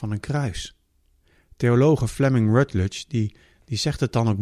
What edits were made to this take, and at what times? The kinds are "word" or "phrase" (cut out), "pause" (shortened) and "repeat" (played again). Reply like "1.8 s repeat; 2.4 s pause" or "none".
1.2 s pause

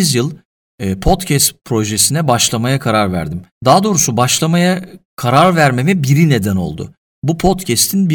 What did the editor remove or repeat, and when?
3.5 s pause

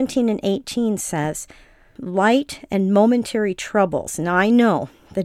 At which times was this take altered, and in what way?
none

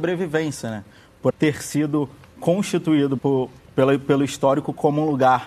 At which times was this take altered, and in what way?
1.3 s phrase; 3.2 s word

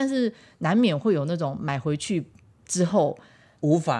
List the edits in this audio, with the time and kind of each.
none

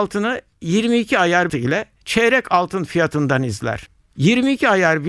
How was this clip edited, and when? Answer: 1.5 s phrase

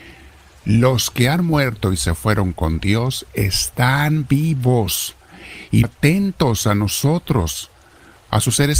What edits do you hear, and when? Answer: 5.8 s phrase

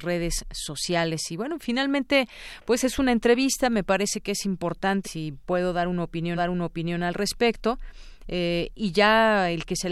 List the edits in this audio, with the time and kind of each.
5.0 s word; 6.4 s repeat

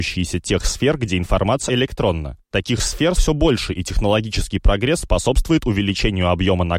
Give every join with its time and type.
1.7 s word; 3.2 s word; 5.0 s word

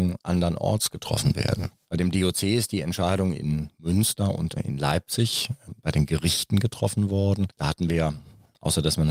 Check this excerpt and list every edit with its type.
none

